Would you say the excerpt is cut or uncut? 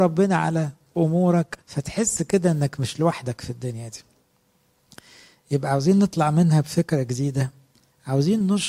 cut